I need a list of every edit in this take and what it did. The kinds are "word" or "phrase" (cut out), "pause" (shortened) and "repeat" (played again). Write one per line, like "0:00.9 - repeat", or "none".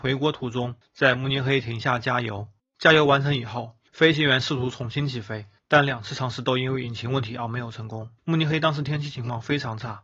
none